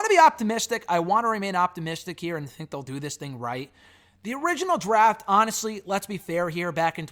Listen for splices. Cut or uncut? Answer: uncut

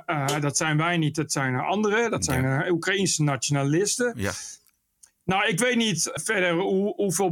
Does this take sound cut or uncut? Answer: cut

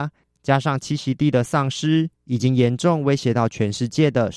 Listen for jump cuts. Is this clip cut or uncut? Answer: cut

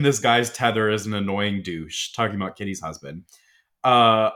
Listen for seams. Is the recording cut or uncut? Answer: uncut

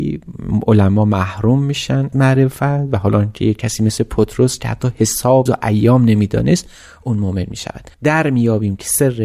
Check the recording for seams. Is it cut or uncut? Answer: cut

